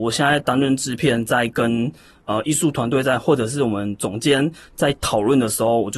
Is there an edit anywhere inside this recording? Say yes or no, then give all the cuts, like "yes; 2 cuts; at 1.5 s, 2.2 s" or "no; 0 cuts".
no; 0 cuts